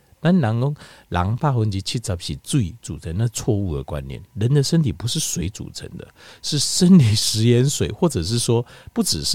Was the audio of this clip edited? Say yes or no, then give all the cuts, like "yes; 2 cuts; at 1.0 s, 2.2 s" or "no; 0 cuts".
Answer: no; 0 cuts